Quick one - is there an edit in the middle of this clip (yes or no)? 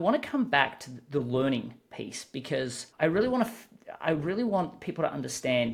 yes